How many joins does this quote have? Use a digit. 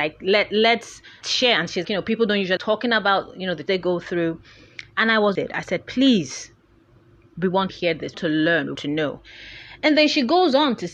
8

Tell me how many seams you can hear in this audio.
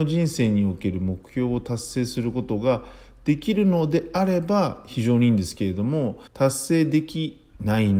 1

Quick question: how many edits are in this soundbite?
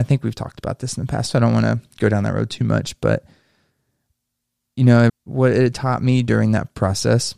1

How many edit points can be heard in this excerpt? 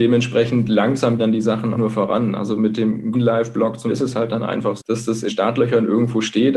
6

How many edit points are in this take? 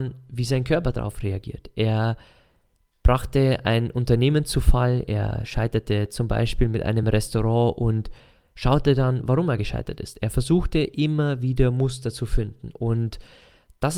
0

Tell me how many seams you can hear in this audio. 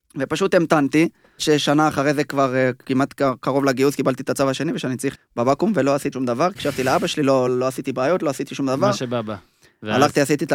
5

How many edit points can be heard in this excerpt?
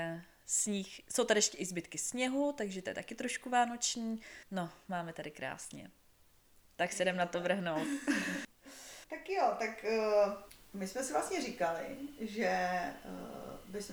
3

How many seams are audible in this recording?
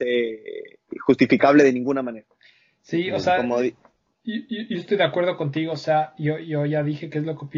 0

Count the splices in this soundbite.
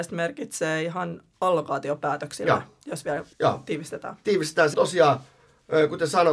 2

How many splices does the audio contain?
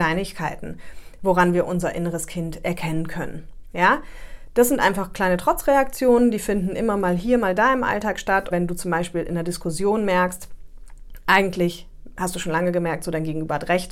1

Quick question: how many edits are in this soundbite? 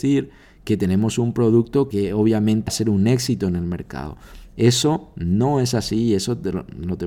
2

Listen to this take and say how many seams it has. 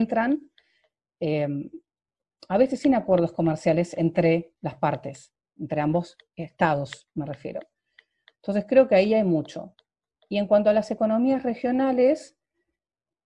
0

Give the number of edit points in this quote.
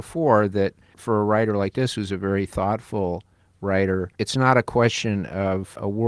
1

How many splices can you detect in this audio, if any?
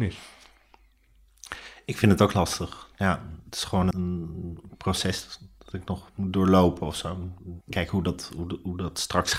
2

